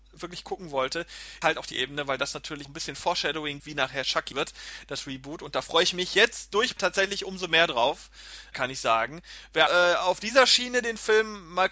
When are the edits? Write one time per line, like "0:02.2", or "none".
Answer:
0:01.4
0:01.7
0:02.6
0:03.6
0:04.3
0:06.8
0:08.5
0:09.7